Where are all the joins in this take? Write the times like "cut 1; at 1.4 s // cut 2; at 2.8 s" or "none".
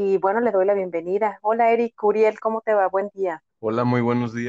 cut 1; at 3.5 s